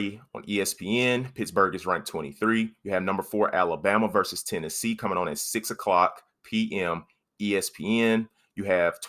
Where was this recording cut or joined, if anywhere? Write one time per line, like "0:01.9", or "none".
none